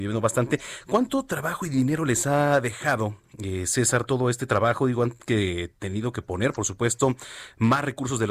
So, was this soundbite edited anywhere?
no; 0 cuts

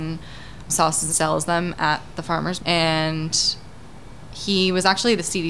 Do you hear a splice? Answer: yes; 2 cuts; at 1.1 s, 2.6 s

